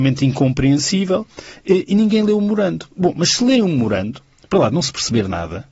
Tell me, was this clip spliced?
no; 0 cuts

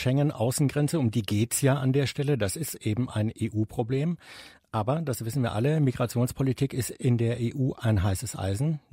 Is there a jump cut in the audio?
no; 0 cuts

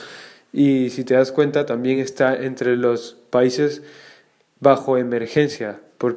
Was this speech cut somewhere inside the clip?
no; 0 cuts

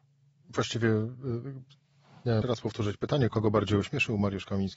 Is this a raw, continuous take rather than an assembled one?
no; 2 cuts; at 2.4 s, 3.3 s

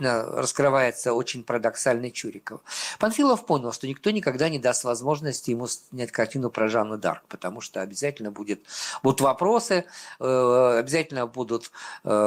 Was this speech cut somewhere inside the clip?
no; 0 cuts

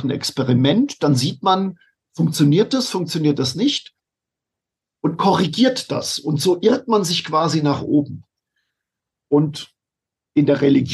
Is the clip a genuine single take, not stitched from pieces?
yes; 0 cuts

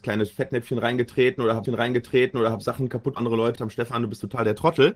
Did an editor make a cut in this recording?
yes; 3 cuts; at 1.7 s, 3.2 s, 3.6 s

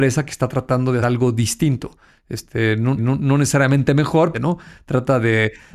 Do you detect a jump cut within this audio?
yes; 3 cuts; at 1.0 s, 3.0 s, 4.3 s

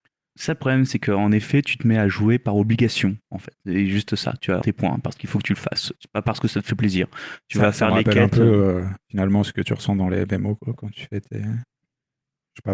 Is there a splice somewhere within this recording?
yes; 2 cuts; at 3.2 s, 4.6 s

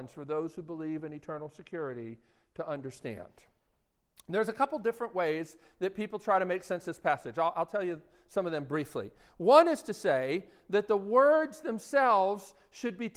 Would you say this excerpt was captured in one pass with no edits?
yes; 0 cuts

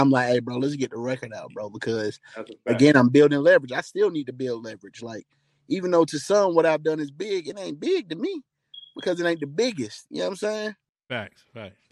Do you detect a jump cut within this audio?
no; 0 cuts

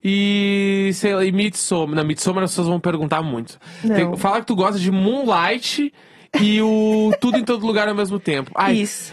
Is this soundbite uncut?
yes; 0 cuts

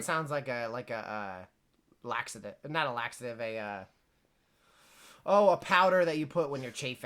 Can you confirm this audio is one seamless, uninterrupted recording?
yes; 0 cuts

